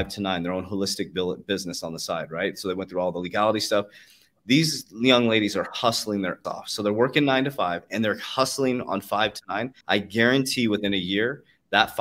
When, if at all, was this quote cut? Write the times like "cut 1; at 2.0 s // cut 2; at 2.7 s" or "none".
cut 1; at 6.4 s // cut 2; at 9.8 s

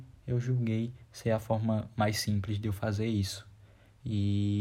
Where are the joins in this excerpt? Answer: none

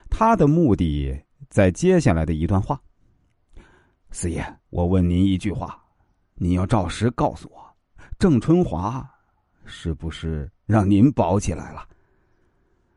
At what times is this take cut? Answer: cut 1; at 4.6 s

